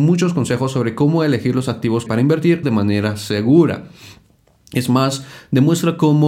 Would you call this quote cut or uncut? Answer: cut